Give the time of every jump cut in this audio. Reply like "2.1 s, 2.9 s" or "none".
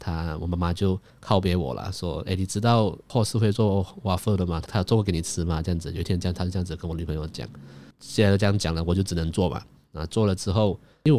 none